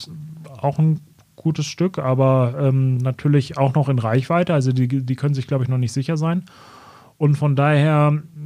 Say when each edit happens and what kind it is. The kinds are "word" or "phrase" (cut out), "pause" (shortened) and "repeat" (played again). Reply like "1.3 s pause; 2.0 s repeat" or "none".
none